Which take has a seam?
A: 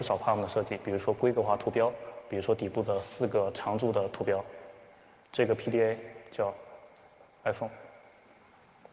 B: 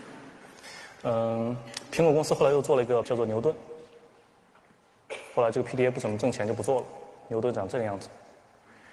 B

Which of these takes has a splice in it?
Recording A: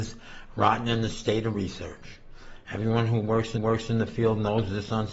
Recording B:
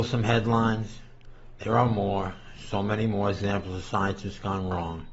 A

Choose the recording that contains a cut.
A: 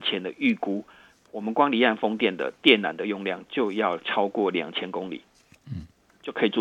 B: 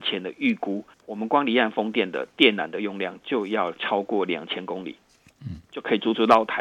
B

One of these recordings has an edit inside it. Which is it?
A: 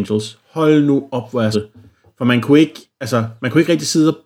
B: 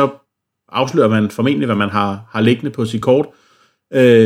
A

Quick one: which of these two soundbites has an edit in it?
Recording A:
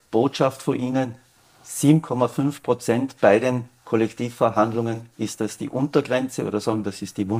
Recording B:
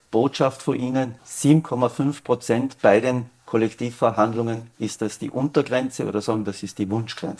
B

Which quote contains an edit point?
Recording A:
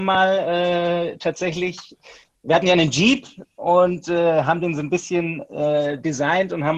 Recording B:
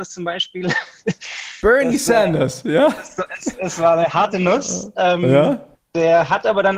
B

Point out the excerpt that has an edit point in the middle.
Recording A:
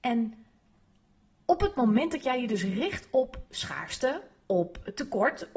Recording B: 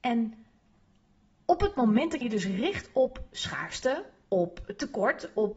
B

